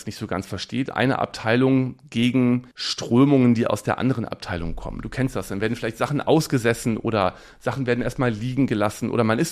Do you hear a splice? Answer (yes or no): yes